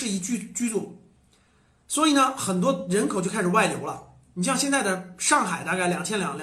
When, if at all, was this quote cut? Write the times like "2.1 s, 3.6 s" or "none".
none

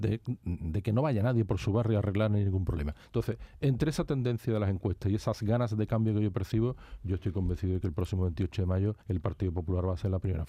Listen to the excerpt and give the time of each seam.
3.0 s, 9.0 s

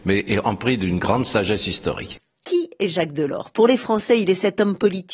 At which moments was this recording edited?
none

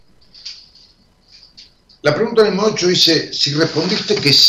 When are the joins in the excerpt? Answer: none

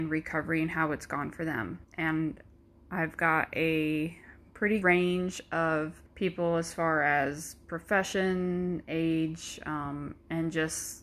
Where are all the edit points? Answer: 1.8 s, 4.8 s, 6.1 s

